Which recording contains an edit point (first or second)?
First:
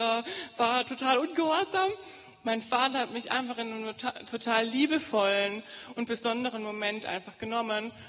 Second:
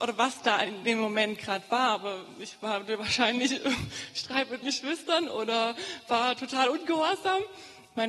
second